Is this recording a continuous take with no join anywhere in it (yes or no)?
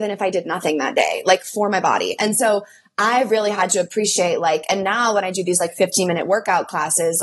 yes